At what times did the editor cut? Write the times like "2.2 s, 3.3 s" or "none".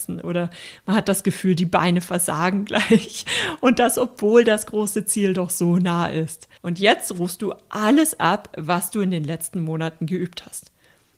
6.6 s